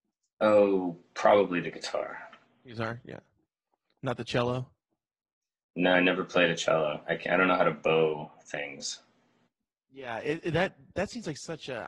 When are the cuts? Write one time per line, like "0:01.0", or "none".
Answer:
none

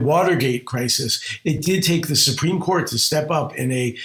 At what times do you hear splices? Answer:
none

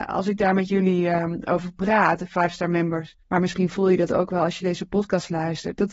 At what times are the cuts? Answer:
0:03.2

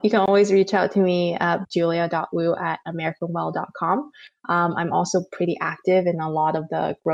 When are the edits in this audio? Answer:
0:01.6

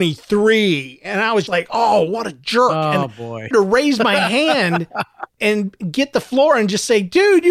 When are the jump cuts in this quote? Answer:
0:01.5
0:03.5
0:05.4

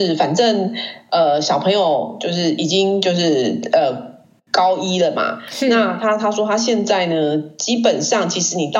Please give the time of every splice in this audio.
none

